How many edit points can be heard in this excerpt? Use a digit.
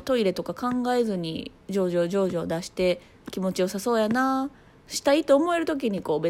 0